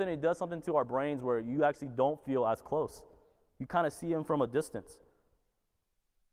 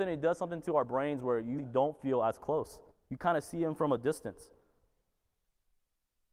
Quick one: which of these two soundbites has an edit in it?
second; 2 cuts; at 1.6 s, 2.9 s

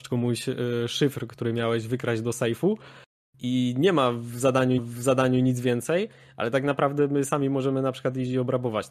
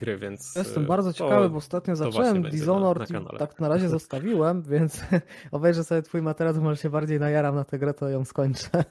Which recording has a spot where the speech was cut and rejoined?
first; 1 cut; at 4.8 s

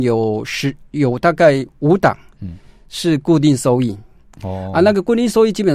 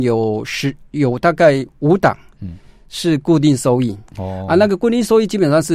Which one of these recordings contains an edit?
second; 1 cut; at 4.1 s

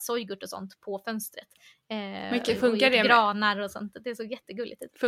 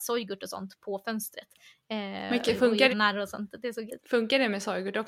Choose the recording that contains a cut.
second; 2 cuts; at 2.9 s, 3.9 s

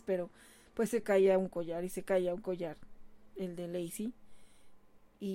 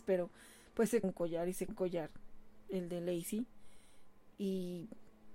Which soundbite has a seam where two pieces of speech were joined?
second; 3 cuts; at 1.0 s, 1.7 s, 4.3 s

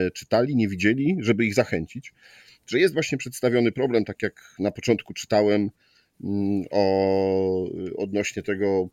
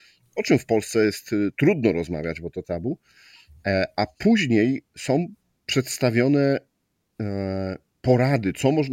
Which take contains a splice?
second; 1 cut; at 2.6 s

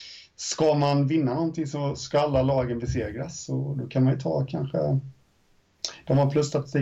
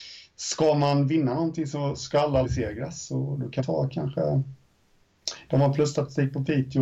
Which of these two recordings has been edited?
second; 2 cuts; at 2.4 s, 3.6 s

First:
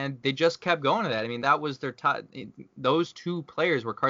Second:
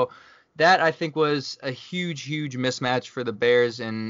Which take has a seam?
first; 1 cut; at 1.4 s

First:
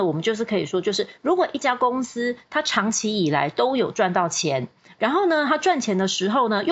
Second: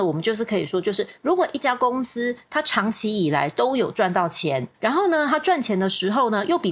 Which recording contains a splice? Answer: second; 1 cut; at 4.7 s

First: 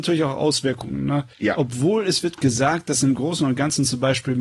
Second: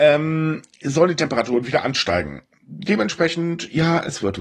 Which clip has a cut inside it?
first; 1 cut; at 1.3 s

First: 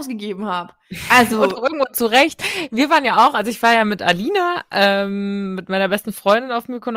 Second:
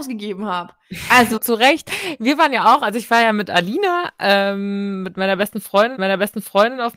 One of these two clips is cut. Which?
second; 2 cuts; at 1.4 s, 6.0 s

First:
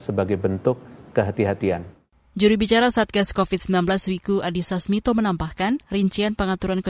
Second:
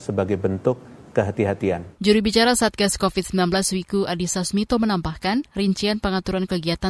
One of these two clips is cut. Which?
second; 1 cut; at 1.9 s

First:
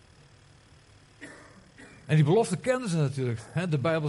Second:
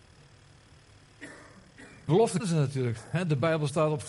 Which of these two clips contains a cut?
second; 2 cuts; at 2.1 s, 2.4 s

